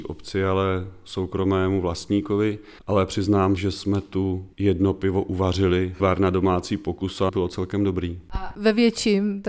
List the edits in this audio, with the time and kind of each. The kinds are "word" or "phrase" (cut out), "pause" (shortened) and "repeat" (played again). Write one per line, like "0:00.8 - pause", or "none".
0:02.8 - pause
0:03.6 - word
0:04.5 - pause
0:06.0 - phrase
0:07.3 - word